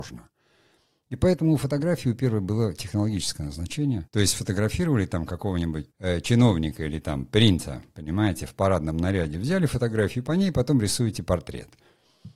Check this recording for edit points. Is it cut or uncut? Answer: cut